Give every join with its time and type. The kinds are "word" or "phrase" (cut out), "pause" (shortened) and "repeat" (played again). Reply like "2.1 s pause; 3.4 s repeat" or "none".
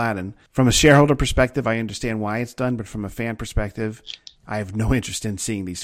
none